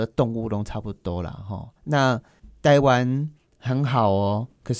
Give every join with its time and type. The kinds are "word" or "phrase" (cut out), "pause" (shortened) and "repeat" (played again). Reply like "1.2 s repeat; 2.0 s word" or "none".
1.8 s pause